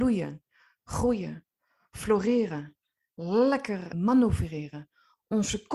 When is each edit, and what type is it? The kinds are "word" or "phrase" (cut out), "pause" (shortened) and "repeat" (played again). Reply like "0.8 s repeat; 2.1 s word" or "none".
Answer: 3.9 s word

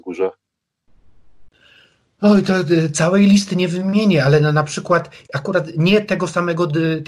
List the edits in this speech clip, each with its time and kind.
none

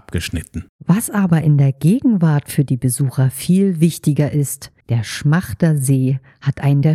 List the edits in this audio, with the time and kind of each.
4.8 s pause

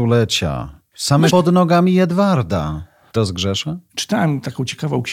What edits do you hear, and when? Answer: 1.3 s word; 3.2 s word

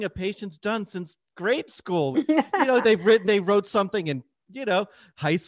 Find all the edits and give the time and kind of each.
2.1 s word; 2.8 s word; 3.2 s word

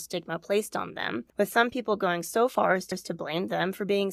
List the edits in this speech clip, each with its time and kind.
1.3 s pause; 2.9 s repeat

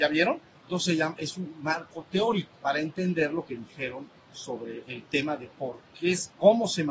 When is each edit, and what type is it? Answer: 2.6 s pause

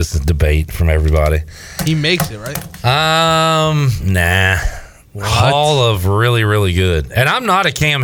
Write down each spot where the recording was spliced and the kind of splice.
none

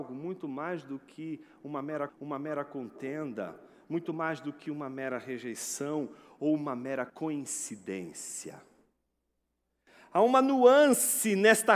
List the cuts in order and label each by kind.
2.1 s repeat; 7.1 s pause

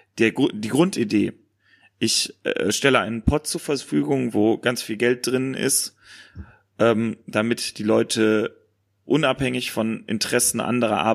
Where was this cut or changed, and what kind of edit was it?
none

